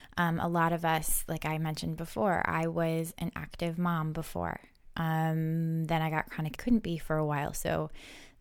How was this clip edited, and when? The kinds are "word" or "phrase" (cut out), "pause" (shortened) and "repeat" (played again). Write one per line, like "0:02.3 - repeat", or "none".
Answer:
0:06.6 - phrase